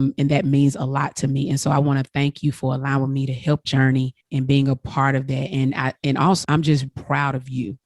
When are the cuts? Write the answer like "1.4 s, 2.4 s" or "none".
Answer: 3.6 s, 4.2 s, 6.4 s, 6.9 s